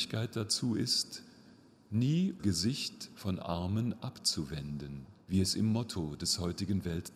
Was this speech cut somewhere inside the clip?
yes; 3 cuts; at 2.4 s, 3.4 s, 5.2 s

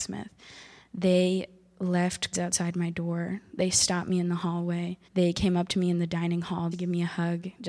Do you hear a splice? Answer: yes; 3 cuts; at 2.3 s, 5.0 s, 6.7 s

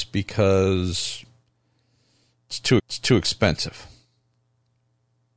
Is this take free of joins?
no; 1 cut; at 2.8 s

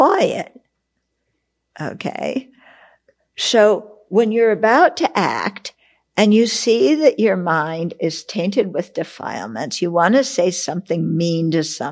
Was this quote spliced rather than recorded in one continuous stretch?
no; 0 cuts

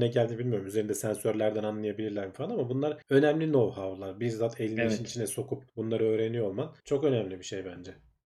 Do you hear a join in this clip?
yes; 3 cuts; at 3.0 s, 5.7 s, 6.8 s

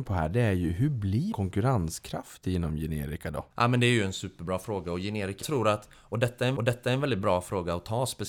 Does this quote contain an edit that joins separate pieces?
yes; 4 cuts; at 1.3 s, 3.5 s, 5.4 s, 6.6 s

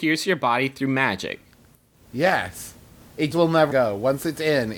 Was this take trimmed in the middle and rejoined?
yes; 3 cuts; at 1.7 s, 3.3 s, 3.7 s

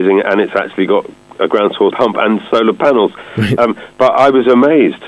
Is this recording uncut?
no; 1 cut; at 1.9 s

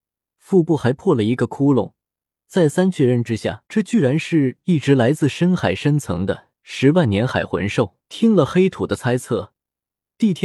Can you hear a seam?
yes; 3 cuts; at 3.7 s, 6.5 s, 8.0 s

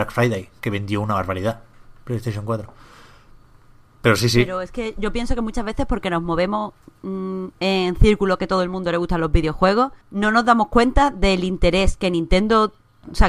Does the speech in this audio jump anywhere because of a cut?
yes; 2 cuts; at 5.0 s, 10.0 s

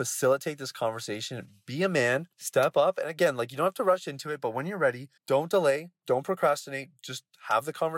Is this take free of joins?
no; 2 cuts; at 2.3 s, 5.2 s

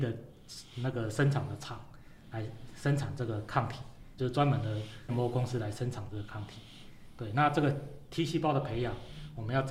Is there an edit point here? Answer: yes; 2 cuts; at 4.2 s, 5.1 s

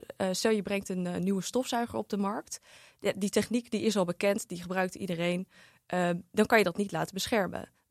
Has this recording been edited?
no; 0 cuts

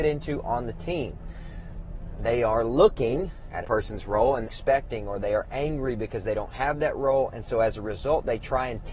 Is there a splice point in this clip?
yes; 2 cuts; at 3.6 s, 4.4 s

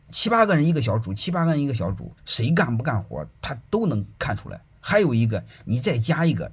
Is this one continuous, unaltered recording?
no; 2 cuts; at 2.2 s, 4.1 s

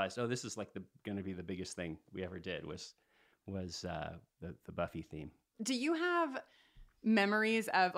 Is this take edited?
no; 0 cuts

